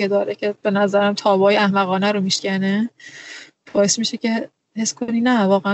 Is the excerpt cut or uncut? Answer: uncut